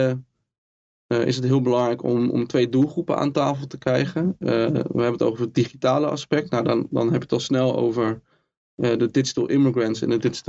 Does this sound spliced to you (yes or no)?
no